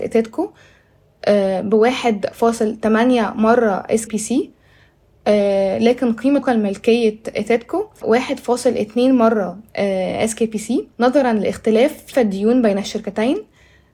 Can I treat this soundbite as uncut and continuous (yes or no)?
no